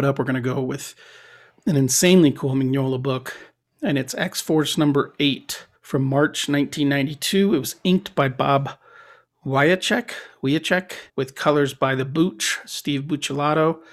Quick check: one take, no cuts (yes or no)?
no